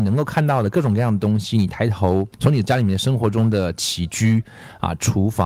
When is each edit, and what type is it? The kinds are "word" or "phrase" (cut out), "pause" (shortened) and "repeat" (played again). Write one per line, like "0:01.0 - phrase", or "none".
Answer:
0:02.3 - pause